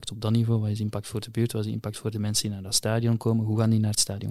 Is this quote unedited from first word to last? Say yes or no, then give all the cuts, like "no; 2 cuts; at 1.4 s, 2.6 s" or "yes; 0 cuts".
yes; 0 cuts